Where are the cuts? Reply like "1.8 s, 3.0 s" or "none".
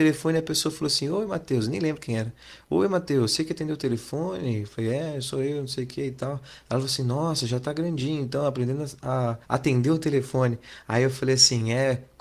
9.4 s

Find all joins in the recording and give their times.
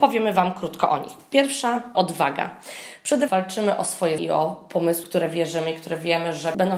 1.9 s, 3.3 s, 4.2 s, 5.0 s

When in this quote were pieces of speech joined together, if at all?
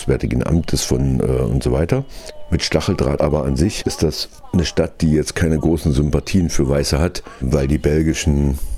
3.2 s

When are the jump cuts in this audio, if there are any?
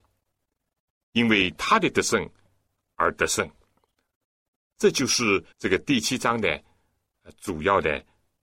5.5 s

